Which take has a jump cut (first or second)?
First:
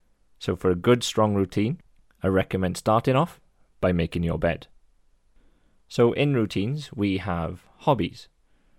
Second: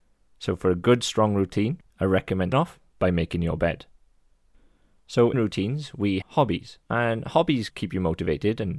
second